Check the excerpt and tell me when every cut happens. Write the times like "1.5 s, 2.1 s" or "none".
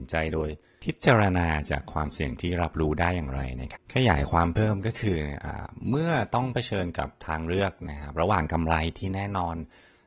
3.8 s